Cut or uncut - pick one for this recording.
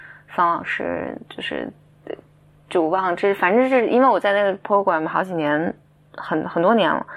uncut